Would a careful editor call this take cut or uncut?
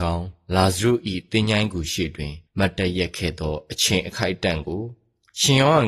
cut